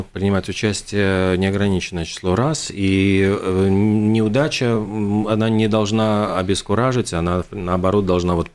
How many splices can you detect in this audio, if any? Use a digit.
0